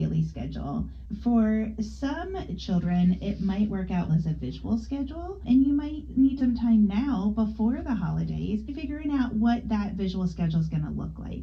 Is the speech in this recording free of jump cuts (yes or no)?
no